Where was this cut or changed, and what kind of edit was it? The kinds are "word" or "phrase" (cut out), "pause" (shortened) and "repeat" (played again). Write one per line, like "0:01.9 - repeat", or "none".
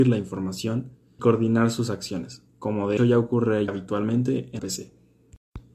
0:01.2 - word
0:02.5 - pause
0:03.0 - word
0:03.7 - word
0:04.6 - word